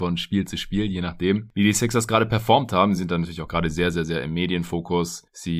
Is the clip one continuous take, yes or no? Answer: yes